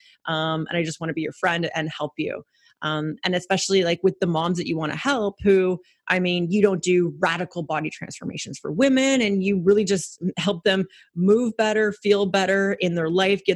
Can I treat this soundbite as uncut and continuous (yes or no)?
yes